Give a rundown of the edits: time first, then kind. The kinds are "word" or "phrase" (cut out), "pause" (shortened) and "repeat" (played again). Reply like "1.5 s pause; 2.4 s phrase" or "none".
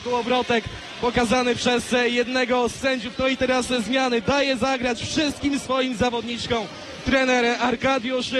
none

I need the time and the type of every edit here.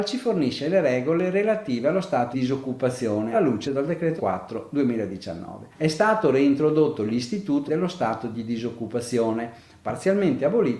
2.3 s word; 3.3 s word; 3.6 s phrase; 4.2 s word; 5.7 s pause; 7.7 s phrase

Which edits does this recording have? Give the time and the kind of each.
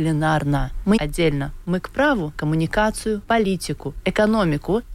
1.0 s phrase; 1.6 s word; 2.3 s word; 4.0 s word

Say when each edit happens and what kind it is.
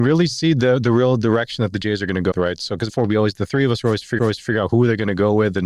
2.3 s word; 2.9 s word; 4.2 s repeat

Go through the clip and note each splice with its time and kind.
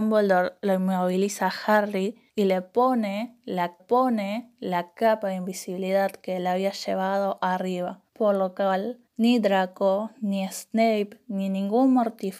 2.3 s pause; 3.8 s repeat; 8.1 s pause; 9.1 s pause

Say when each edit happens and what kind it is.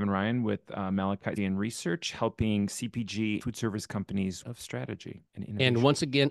1.4 s word; 3.4 s word; 4.4 s phrase; 5.3 s pause

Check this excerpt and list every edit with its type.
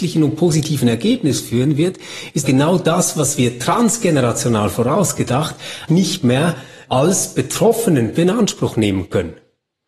2.4 s word; 5.9 s word; 6.9 s word; 8.1 s word

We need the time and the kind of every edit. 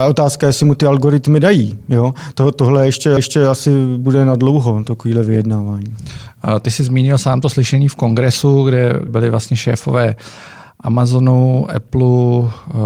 3.2 s repeat; 9.1 s word

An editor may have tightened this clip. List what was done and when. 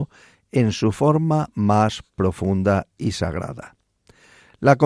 none

